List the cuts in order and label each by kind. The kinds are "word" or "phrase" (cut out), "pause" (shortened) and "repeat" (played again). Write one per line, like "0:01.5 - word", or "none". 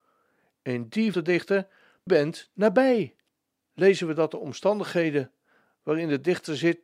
0:01.1 - phrase
0:02.1 - phrase
0:03.3 - pause